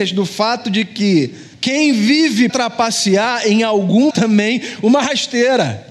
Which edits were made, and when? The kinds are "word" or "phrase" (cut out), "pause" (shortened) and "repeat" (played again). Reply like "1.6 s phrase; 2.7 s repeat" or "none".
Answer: 1.5 s pause; 2.5 s word; 4.1 s phrase

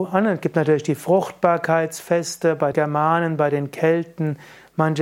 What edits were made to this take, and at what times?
2.7 s word

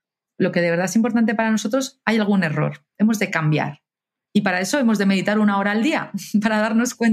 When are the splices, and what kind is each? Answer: none

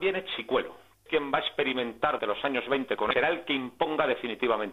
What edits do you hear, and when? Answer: 1.1 s word; 2.2 s word; 3.1 s phrase

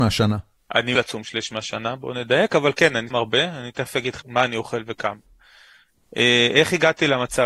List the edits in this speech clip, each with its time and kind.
1.0 s word; 3.1 s word; 4.2 s word

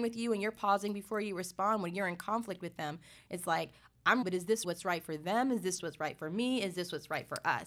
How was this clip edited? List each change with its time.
4.2 s word; 4.6 s word; 5.8 s word

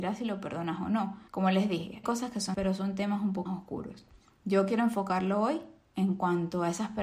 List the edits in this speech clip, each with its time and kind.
1.3 s pause; 2.0 s word; 2.5 s word; 3.5 s word

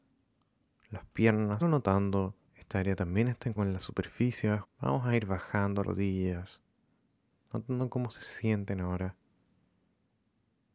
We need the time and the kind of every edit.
1.6 s word; 2.5 s pause; 3.6 s word; 4.6 s phrase; 5.8 s phrase

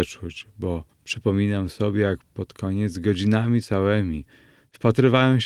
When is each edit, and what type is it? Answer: 0.9 s pause

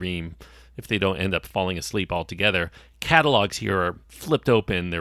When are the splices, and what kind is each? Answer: none

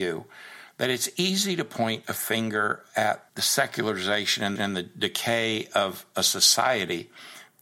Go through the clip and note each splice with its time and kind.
3.3 s word; 4.6 s repeat

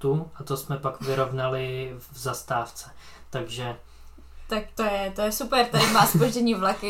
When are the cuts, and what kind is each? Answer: none

